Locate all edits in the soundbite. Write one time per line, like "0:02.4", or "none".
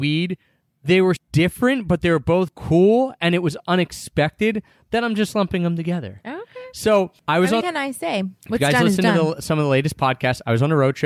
0:01.2
0:02.5
0:07.2
0:07.6
0:08.4